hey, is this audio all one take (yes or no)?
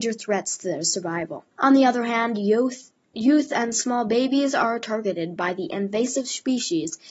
no